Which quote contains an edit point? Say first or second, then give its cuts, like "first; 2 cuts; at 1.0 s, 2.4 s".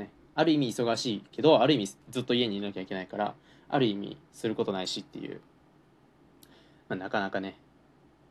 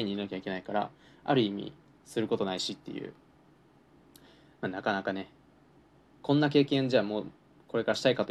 first; 2 cuts; at 2.0 s, 4.3 s